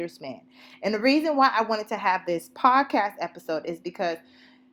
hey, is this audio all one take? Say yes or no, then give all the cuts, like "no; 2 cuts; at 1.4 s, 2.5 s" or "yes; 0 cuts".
yes; 0 cuts